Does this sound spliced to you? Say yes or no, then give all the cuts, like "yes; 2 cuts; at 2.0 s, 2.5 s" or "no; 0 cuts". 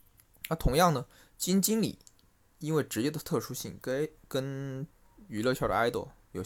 no; 0 cuts